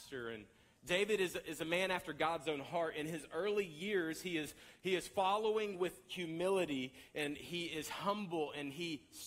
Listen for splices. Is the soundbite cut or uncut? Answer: uncut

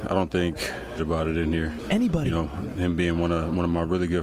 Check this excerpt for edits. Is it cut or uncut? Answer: cut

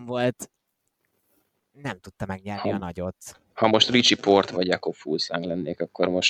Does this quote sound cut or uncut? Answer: uncut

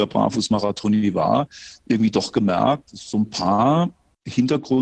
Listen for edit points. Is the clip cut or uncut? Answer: uncut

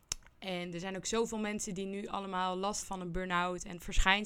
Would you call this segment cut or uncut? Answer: cut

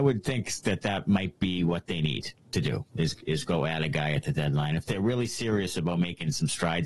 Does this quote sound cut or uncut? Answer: cut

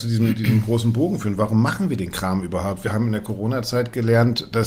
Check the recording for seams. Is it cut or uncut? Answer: uncut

